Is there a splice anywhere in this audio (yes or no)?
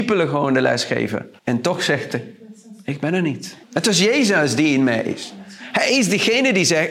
yes